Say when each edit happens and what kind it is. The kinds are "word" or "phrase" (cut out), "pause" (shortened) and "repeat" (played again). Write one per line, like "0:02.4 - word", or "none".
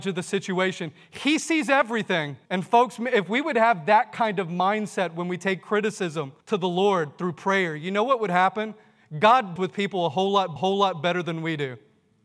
0:02.4 - pause
0:06.4 - pause
0:09.6 - word
0:10.6 - repeat